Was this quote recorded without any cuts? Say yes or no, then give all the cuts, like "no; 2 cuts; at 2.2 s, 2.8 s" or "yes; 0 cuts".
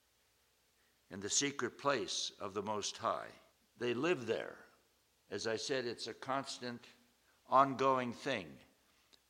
no; 2 cuts; at 3.5 s, 5.1 s